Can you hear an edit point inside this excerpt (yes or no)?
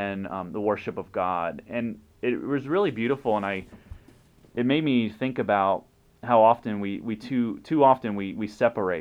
no